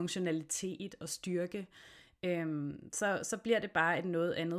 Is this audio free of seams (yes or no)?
yes